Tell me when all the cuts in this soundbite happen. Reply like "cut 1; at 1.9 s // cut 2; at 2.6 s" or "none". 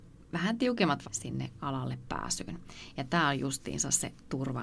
cut 1; at 1.0 s

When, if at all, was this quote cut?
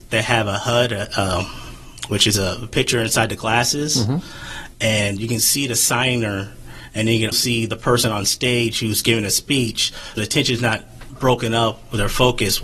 cut 1; at 2.7 s // cut 2; at 7.3 s // cut 3; at 10.2 s

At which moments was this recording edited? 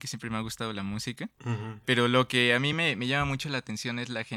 none

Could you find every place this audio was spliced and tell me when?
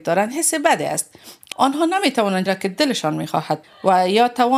cut 1; at 1.5 s // cut 2; at 2.5 s // cut 3; at 3.6 s

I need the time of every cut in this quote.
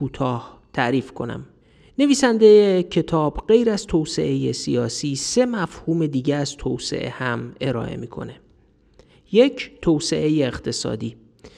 none

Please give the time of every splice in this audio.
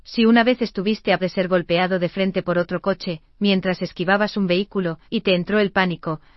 cut 1; at 1.2 s // cut 2; at 5.0 s

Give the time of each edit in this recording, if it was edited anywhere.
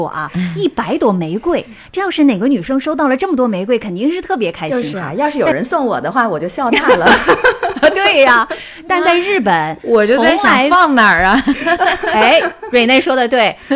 none

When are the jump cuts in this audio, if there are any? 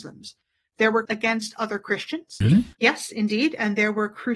cut 1; at 1.1 s

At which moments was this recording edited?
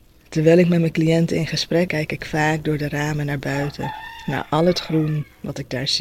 cut 1; at 1.9 s

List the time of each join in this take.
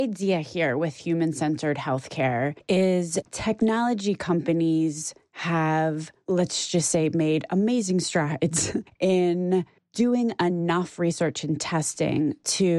none

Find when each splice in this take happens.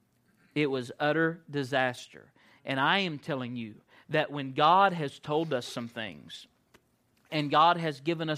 none

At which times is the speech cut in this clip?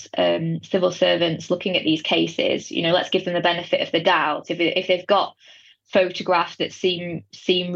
none

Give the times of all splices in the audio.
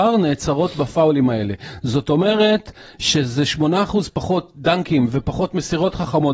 none

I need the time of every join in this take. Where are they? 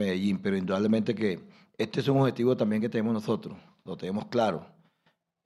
none

